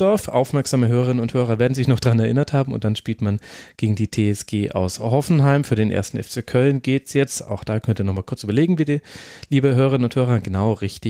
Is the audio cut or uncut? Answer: uncut